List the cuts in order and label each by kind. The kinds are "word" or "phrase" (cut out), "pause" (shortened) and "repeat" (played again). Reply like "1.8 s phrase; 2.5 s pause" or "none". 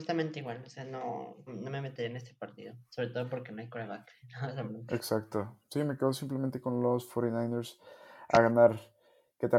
1.5 s word